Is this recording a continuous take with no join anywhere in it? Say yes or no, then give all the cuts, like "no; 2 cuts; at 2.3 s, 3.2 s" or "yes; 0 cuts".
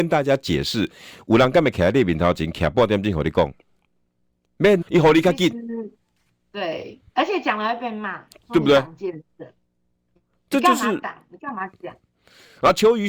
no; 2 cuts; at 4.8 s, 7.1 s